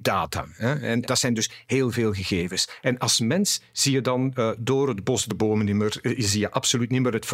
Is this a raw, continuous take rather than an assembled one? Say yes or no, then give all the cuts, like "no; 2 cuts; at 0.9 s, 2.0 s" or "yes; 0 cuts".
no; 2 cuts; at 1.0 s, 1.6 s